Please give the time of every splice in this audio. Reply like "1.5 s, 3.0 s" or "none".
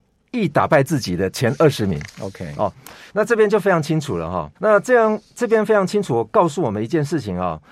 3.1 s, 4.6 s